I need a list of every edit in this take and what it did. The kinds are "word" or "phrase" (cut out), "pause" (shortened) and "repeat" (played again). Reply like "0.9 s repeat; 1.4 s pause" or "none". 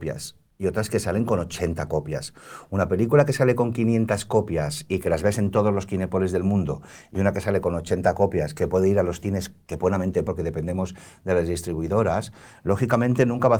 10.3 s word